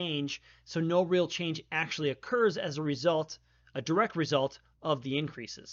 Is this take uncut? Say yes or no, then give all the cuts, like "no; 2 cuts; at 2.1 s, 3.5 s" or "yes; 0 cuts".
yes; 0 cuts